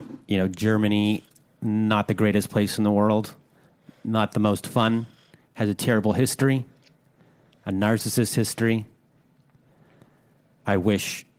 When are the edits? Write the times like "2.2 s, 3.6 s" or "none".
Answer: none

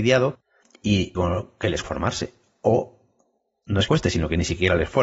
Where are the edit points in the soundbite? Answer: 1.1 s, 1.8 s, 3.9 s

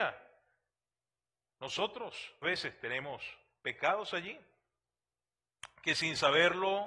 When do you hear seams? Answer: 2.4 s

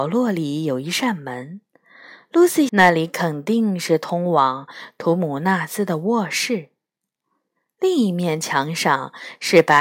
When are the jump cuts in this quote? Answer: 2.7 s

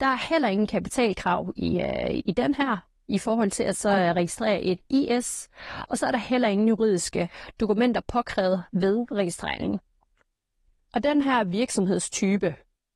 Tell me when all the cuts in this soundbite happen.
none

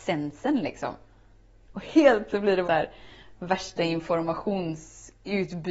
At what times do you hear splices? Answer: 2.3 s, 2.6 s

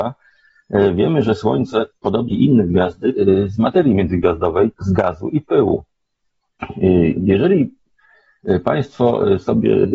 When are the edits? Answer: 2.3 s, 3.1 s, 4.7 s

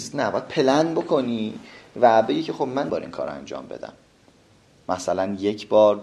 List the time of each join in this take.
2.9 s

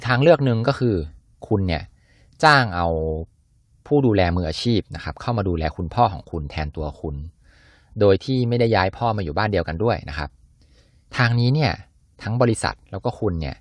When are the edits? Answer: none

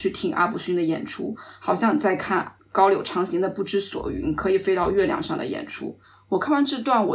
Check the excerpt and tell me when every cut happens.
2.6 s, 6.0 s

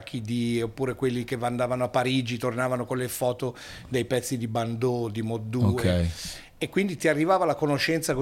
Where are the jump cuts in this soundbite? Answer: none

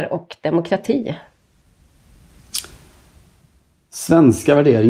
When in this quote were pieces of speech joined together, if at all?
none

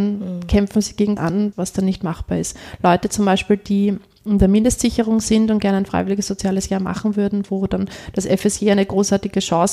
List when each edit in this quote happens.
1.2 s, 1.5 s

